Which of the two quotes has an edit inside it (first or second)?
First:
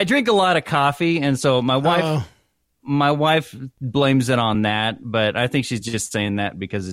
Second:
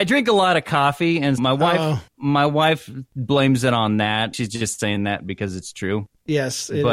second